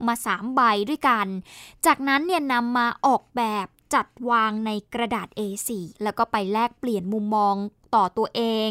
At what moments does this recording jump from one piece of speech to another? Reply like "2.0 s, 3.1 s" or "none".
6.0 s

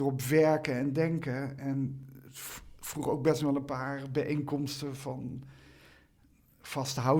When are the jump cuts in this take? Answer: none

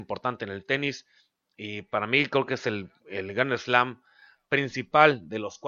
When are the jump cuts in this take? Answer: none

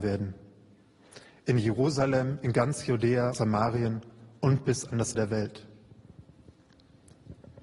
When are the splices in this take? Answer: 3.3 s, 5.1 s

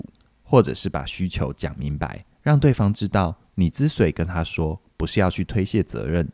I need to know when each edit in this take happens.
2.3 s

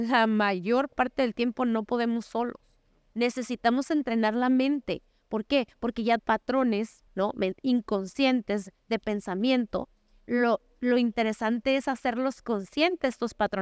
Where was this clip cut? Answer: 6.2 s, 7.1 s

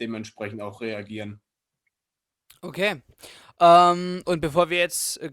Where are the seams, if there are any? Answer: none

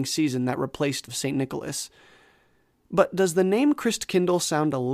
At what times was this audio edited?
1.1 s

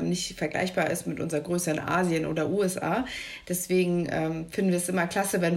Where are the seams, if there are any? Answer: none

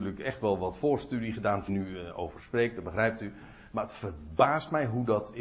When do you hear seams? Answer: 1.7 s

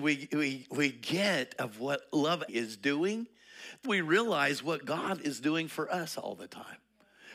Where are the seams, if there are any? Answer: 2.5 s, 3.8 s

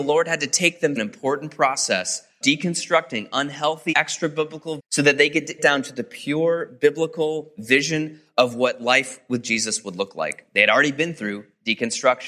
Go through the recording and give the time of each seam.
1.0 s, 2.4 s, 3.9 s, 4.8 s, 5.6 s

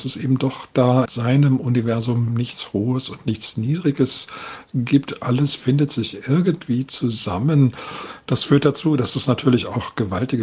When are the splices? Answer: 1.1 s

